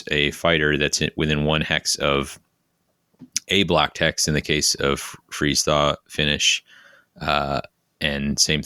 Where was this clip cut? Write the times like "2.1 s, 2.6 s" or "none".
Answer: none